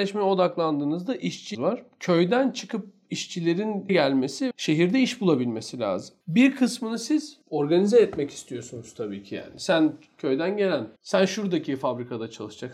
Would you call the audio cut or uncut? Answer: cut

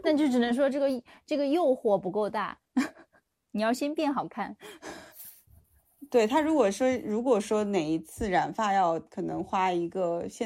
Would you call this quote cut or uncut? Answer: cut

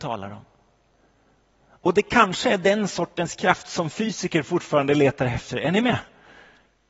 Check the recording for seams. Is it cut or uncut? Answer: uncut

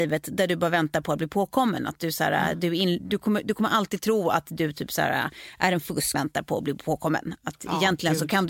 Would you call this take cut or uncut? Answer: cut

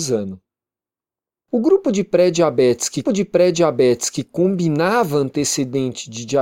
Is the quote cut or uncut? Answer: cut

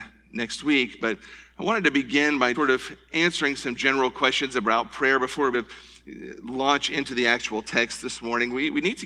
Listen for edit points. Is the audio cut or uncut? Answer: cut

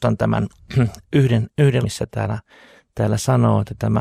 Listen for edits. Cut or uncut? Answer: cut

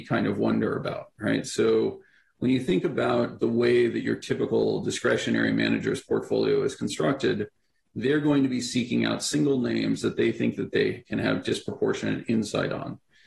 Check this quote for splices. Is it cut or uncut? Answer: uncut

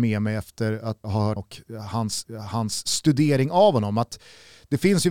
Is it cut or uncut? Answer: cut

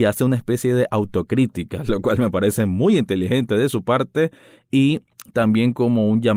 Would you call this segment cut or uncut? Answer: uncut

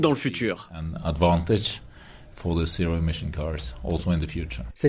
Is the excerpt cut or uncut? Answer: uncut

